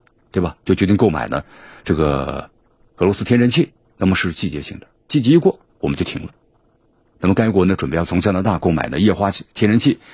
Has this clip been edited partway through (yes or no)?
no